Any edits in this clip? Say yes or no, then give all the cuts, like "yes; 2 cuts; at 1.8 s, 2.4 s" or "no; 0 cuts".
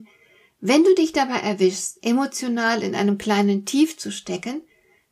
no; 0 cuts